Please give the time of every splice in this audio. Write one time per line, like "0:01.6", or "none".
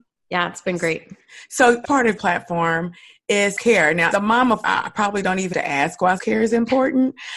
0:01.8
0:02.2
0:03.6
0:04.1
0:04.6
0:05.5
0:06.2

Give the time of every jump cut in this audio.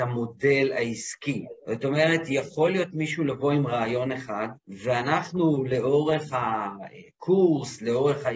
0:01.6
0:04.6

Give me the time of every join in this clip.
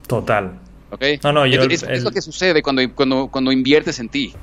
none

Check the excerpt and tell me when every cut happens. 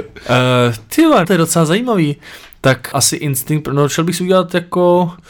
0:01.2
0:02.9

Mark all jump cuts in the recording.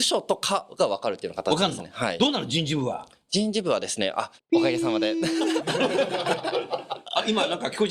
0:04.4

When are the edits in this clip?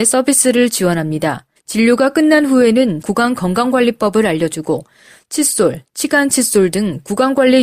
0:01.6
0:03.0

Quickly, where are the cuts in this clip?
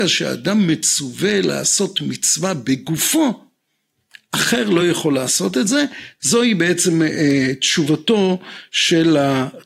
none

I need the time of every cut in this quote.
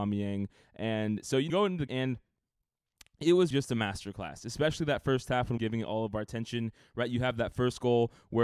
0:01.5
0:01.9
0:03.5
0:05.6

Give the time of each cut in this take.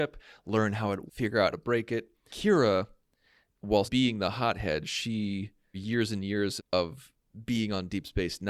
0:01.1
0:01.5
0:02.3
0:03.8
0:05.7
0:06.6

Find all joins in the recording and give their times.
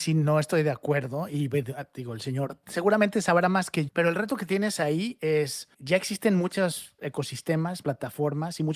0:03.9
0:07.8

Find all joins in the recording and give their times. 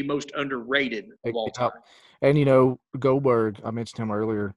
none

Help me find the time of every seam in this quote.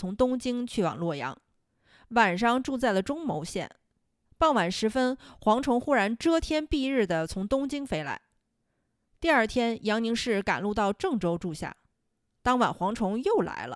none

